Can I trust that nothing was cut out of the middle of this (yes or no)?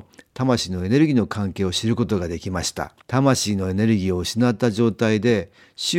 no